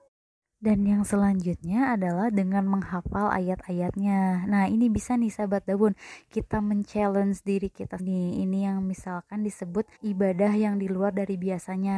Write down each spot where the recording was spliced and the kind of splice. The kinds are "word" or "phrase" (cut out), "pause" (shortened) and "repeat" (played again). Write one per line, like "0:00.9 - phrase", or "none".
0:08.0 - word
0:10.0 - pause